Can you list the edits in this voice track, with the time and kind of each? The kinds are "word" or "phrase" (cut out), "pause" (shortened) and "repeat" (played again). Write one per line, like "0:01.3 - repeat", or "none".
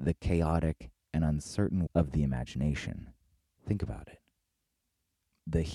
0:01.9 - word
0:03.4 - pause